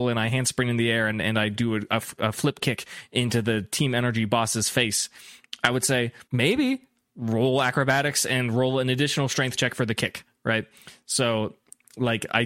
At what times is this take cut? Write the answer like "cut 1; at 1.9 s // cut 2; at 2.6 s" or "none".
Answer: cut 1; at 6.3 s

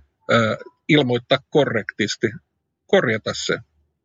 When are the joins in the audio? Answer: none

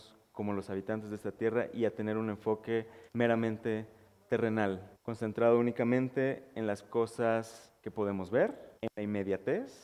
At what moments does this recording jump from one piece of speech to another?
cut 1; at 3.1 s // cut 2; at 4.9 s // cut 3; at 7.8 s // cut 4; at 8.8 s

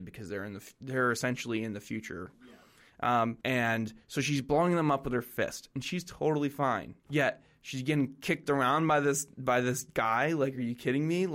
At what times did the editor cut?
cut 1; at 3.4 s // cut 2; at 7.0 s

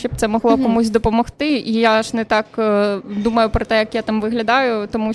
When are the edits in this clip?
none

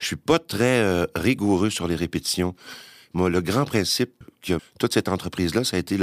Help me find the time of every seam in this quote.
cut 1; at 4.2 s // cut 2; at 4.6 s

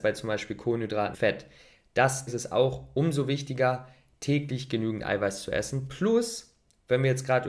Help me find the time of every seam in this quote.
cut 1; at 1.1 s // cut 2; at 2.3 s

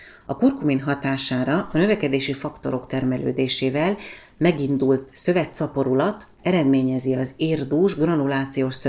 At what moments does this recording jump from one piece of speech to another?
none

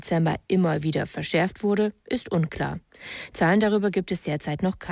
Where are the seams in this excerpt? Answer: none

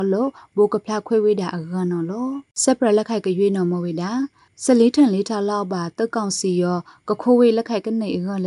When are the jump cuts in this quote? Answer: cut 1; at 2.5 s // cut 2; at 4.5 s

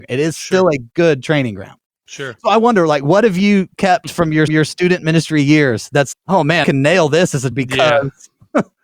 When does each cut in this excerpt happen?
cut 1; at 4.5 s // cut 2; at 6.1 s // cut 3; at 6.6 s // cut 4; at 7.5 s

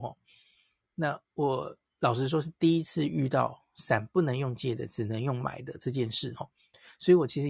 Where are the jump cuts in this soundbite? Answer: none

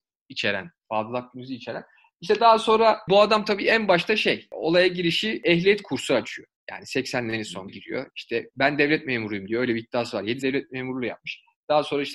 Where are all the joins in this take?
cut 1; at 7.7 s // cut 2; at 10.4 s

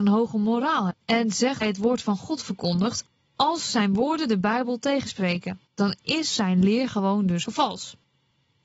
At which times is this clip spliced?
cut 1; at 0.9 s // cut 2; at 1.6 s // cut 3; at 3.1 s // cut 4; at 5.7 s // cut 5; at 7.5 s

